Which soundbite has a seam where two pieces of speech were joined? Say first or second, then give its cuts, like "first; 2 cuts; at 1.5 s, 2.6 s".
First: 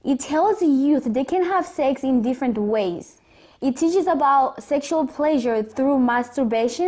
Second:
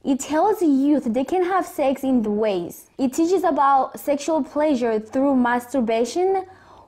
second; 2 cuts; at 2.2 s, 2.9 s